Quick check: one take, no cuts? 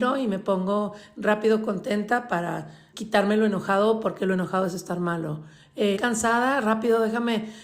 no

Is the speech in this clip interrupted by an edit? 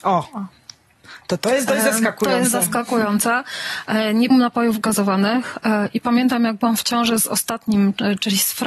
yes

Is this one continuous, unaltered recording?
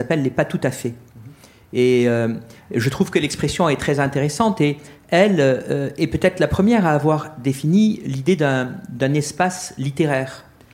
yes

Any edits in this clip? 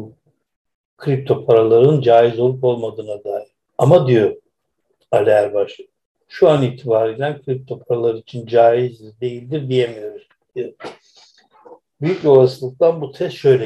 no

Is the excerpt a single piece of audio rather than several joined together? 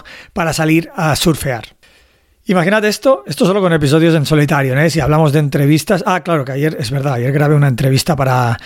yes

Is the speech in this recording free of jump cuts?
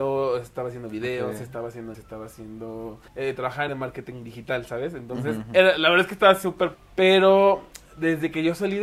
no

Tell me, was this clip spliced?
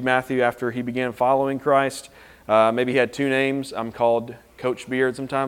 no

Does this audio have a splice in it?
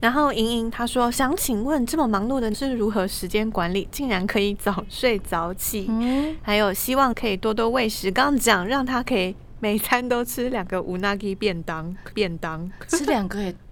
yes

